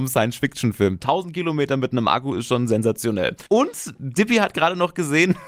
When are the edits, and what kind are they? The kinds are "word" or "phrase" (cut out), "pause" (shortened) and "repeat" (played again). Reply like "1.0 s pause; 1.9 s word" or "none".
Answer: 3.5 s pause